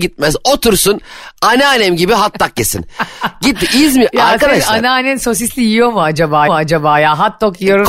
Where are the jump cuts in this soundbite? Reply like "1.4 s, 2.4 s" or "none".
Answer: 6.5 s